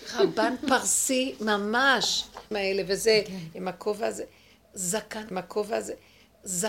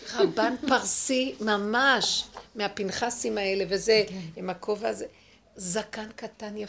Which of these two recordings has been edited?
first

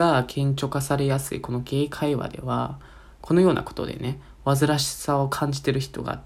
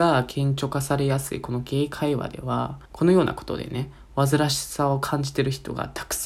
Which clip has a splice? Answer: second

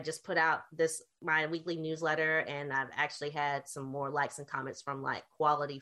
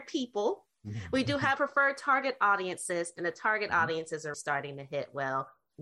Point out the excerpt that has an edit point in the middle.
second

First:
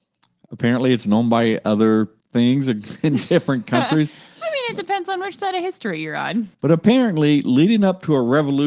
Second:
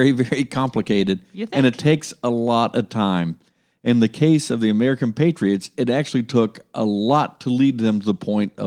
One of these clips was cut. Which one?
first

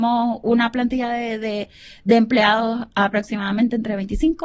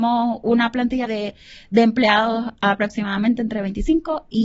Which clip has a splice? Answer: second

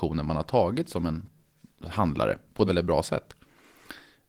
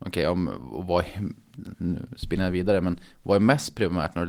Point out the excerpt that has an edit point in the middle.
first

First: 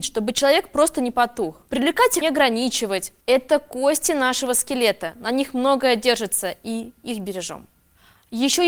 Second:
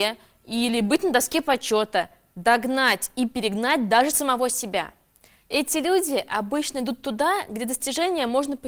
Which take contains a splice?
first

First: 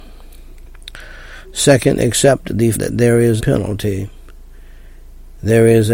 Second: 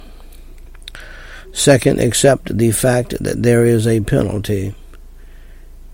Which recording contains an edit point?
first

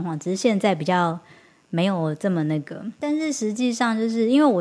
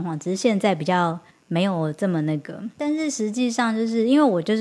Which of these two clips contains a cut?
second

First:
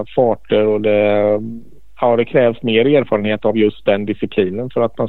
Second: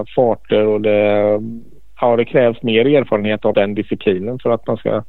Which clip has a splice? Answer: second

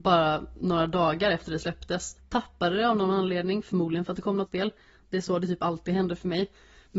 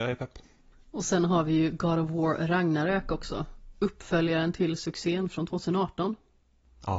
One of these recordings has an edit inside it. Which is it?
first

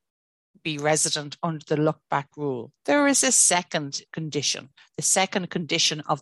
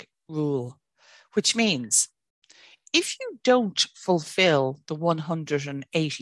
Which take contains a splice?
first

